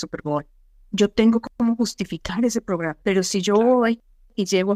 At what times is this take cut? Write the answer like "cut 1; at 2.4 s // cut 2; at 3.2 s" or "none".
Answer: cut 1; at 1.5 s // cut 2; at 3.0 s